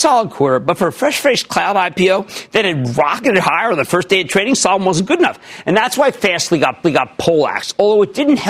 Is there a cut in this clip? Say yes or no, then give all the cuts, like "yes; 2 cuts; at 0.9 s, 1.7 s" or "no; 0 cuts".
yes; 1 cut; at 6.8 s